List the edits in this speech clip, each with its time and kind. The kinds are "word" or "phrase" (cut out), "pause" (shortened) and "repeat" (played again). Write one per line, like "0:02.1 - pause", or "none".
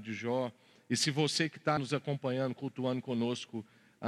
0:01.8 - word